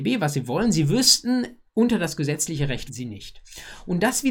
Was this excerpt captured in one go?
no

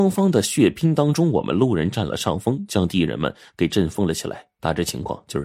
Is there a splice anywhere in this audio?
yes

